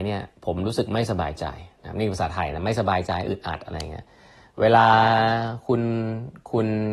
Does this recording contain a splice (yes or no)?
no